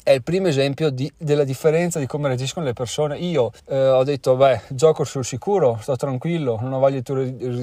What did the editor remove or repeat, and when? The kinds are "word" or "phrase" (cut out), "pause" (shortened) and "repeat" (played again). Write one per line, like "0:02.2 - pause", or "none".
0:03.6 - pause